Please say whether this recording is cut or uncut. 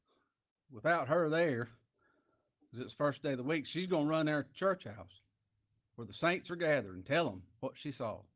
uncut